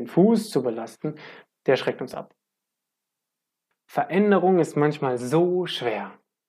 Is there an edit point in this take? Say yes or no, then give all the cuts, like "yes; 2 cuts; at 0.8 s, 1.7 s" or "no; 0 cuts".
no; 0 cuts